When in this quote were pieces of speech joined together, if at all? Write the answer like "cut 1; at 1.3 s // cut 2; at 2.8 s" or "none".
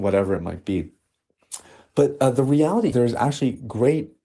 cut 1; at 2.9 s